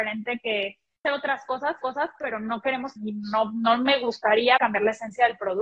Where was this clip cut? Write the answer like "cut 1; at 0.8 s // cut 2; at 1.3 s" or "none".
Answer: cut 1; at 1.0 s // cut 2; at 1.8 s // cut 3; at 3.0 s // cut 4; at 4.6 s